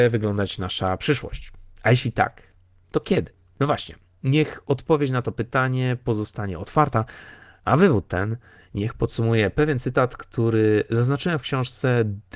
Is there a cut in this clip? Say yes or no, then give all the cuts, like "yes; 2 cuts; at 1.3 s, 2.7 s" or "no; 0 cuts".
no; 0 cuts